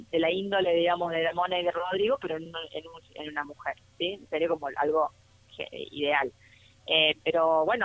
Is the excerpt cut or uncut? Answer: uncut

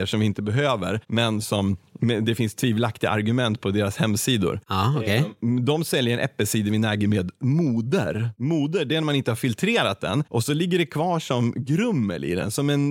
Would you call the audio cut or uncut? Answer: uncut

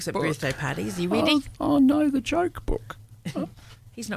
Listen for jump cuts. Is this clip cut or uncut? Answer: uncut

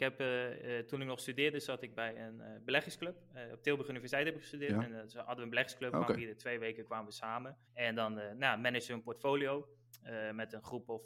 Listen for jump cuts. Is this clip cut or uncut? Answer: cut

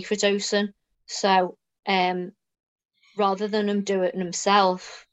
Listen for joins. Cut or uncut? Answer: uncut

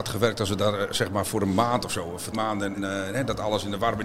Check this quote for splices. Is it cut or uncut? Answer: cut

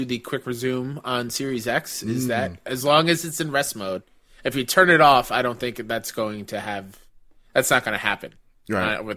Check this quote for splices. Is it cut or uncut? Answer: uncut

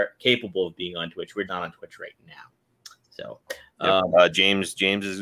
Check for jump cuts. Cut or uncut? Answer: cut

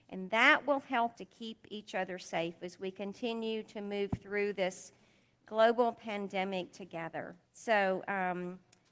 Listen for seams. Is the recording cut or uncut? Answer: cut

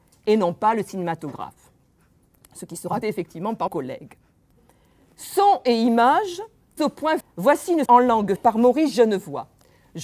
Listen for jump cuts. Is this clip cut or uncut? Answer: cut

